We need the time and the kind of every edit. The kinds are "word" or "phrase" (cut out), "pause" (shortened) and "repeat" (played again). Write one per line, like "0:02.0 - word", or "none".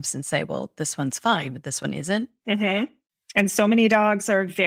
none